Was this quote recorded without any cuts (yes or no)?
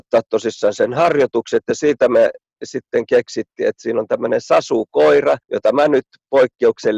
no